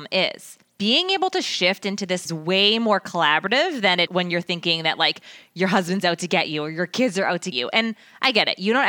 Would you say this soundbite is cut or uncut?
cut